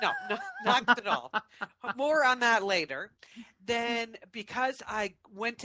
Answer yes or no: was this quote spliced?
yes